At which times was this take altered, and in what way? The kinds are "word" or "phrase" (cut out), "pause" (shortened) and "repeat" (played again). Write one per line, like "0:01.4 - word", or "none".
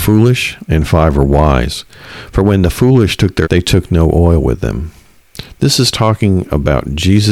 0:03.4 - word